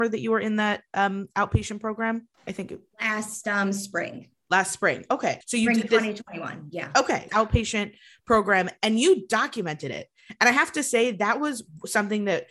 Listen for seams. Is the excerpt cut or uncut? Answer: cut